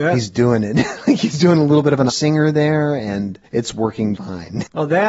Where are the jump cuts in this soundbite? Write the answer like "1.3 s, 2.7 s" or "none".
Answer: 2.1 s, 3.5 s, 4.2 s